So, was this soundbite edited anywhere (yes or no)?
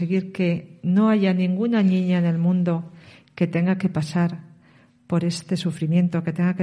no